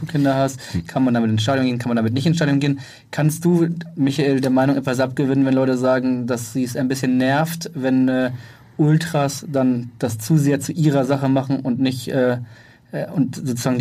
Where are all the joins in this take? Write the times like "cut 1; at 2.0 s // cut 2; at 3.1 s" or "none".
none